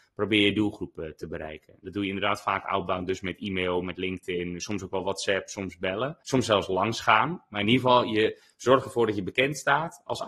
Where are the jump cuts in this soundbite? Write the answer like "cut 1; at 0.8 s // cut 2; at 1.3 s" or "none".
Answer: cut 1; at 6.2 s